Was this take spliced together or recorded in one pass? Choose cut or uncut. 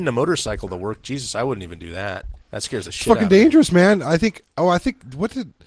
cut